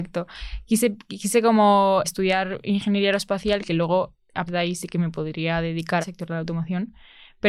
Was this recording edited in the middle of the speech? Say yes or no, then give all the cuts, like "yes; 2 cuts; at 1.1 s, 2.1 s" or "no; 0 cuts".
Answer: yes; 3 cuts; at 2.0 s, 4.5 s, 6.0 s